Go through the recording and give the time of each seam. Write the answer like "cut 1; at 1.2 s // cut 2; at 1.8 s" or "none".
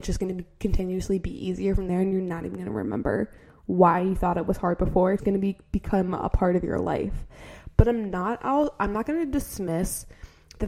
cut 1; at 5.2 s